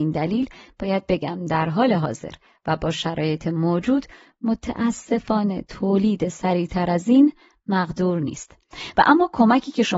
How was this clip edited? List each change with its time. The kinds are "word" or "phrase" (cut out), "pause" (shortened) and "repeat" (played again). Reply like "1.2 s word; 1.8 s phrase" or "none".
none